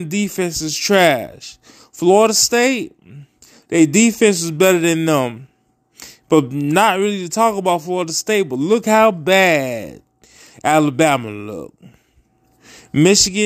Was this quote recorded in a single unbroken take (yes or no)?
yes